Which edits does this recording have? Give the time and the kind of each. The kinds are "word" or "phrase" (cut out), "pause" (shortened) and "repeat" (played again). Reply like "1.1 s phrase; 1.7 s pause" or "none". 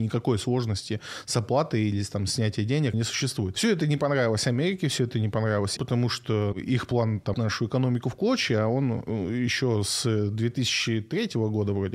2.9 s word; 5.8 s word; 6.5 s word; 7.3 s word